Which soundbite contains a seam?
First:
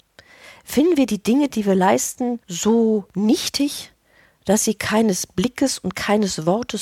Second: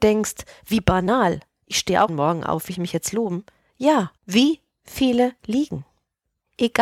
second; 4 cuts; at 2.1 s, 2.7 s, 4.2 s, 5.4 s

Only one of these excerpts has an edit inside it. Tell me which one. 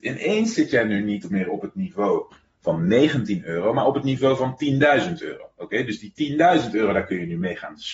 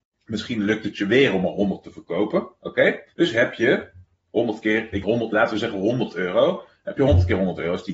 second; 3 cuts; at 3.1 s, 4.1 s, 5.0 s

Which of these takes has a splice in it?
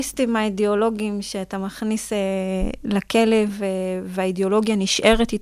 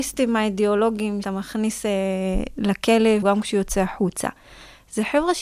second; 2 cuts; at 1.2 s, 3.2 s

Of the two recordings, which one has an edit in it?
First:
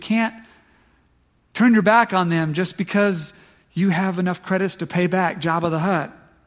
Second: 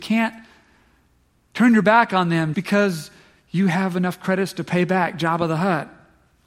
second; 1 cut; at 2.5 s

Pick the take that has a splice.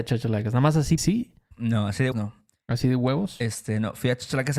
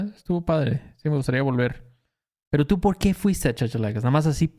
first; 2 cuts; at 1.0 s, 2.1 s

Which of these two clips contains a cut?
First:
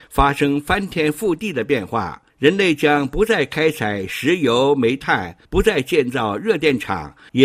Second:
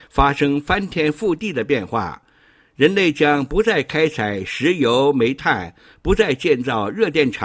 first; 2 cuts; at 2.3 s, 5.4 s

